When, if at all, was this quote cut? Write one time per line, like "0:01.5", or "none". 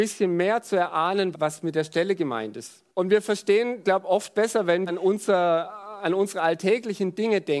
0:01.3
0:02.9
0:03.8
0:04.9